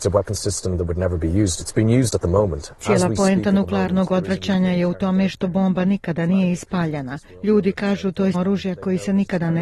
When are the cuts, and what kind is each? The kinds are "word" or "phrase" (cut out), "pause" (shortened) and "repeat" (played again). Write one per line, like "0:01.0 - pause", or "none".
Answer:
0:08.3 - word